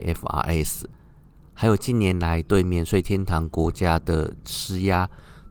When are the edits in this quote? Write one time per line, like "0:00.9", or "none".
none